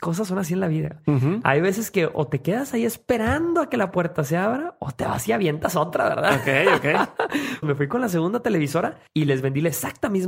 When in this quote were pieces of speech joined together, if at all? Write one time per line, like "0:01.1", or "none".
0:07.6
0:09.1